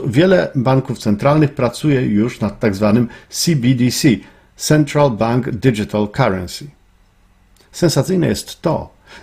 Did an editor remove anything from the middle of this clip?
no; 0 cuts

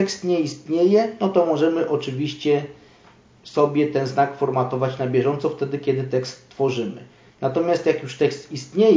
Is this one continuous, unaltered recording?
yes; 0 cuts

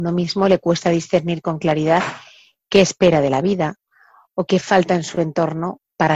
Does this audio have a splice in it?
no; 0 cuts

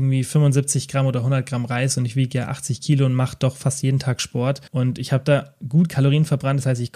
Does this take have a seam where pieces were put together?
yes; 1 cut; at 4.7 s

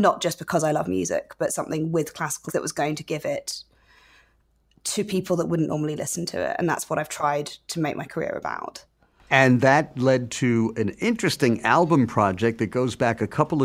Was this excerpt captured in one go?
no; 1 cut; at 2.5 s

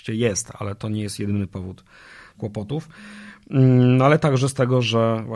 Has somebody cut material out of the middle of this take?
yes; 1 cut; at 2.3 s

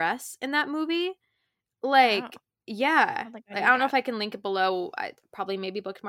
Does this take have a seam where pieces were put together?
no; 0 cuts

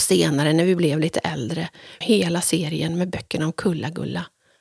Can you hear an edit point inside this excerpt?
yes; 1 cut; at 2.0 s

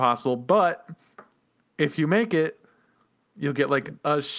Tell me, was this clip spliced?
no; 0 cuts

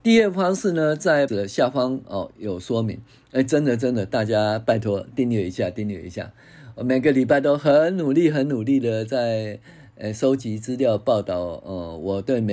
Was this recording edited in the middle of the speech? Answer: yes; 1 cut; at 1.3 s

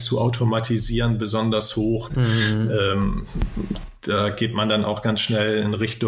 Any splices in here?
yes; 1 cut; at 2.1 s

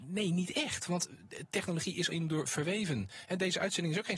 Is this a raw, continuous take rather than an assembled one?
no; 1 cut; at 2.1 s

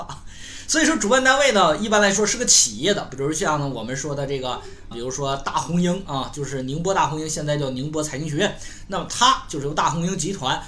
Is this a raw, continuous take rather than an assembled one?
no; 1 cut; at 4.9 s

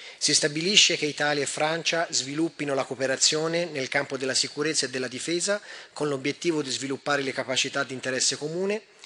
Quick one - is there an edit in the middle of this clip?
no; 0 cuts

